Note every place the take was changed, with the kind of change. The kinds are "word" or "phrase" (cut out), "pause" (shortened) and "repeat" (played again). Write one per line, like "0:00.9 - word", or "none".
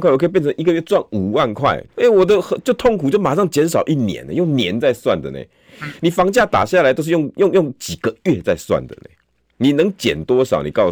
0:01.9 - pause